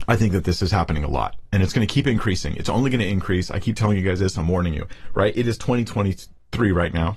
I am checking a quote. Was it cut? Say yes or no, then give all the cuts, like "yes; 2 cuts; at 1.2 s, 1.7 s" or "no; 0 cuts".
no; 0 cuts